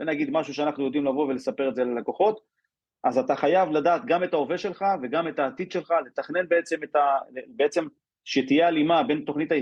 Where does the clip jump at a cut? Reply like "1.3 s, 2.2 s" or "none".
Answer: none